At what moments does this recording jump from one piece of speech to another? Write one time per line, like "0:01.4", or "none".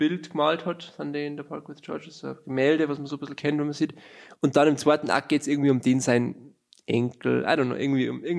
none